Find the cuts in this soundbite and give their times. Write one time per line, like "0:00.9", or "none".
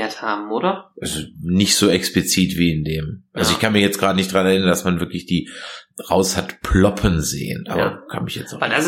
none